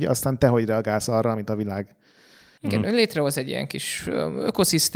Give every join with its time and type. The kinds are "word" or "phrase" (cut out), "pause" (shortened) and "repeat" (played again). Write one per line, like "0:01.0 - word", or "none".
none